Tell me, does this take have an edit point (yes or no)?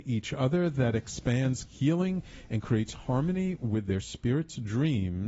yes